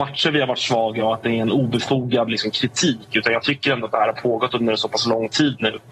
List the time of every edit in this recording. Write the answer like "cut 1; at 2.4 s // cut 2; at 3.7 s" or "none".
none